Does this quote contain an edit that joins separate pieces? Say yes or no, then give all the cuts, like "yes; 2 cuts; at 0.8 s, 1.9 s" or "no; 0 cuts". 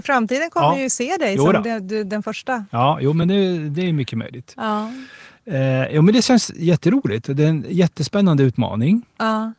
no; 0 cuts